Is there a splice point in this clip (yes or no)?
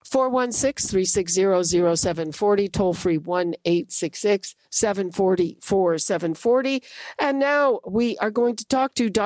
yes